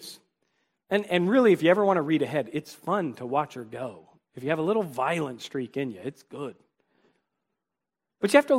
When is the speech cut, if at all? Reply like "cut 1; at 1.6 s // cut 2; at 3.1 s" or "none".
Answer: none

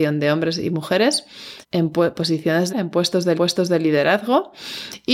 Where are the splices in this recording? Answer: cut 1; at 1.6 s // cut 2; at 2.7 s // cut 3; at 3.4 s

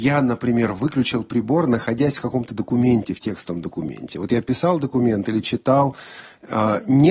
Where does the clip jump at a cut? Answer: none

